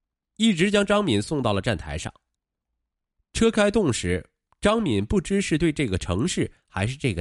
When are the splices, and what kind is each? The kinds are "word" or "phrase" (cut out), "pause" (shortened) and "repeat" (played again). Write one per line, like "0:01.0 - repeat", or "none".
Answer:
none